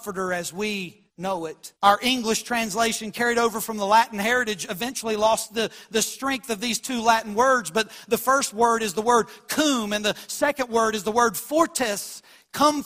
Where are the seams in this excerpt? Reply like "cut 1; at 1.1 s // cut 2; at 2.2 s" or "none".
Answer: cut 1; at 1.1 s // cut 2; at 1.8 s